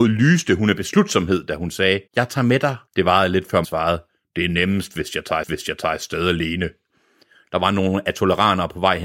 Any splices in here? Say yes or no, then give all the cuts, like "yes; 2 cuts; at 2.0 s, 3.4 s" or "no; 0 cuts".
yes; 4 cuts; at 2.1 s, 2.9 s, 3.6 s, 5.4 s